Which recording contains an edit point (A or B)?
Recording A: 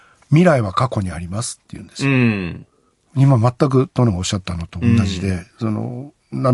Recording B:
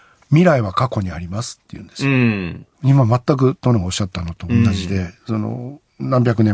B